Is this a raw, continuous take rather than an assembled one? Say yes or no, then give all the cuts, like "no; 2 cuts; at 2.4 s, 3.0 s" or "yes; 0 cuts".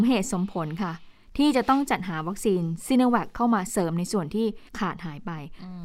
no; 1 cut; at 4.7 s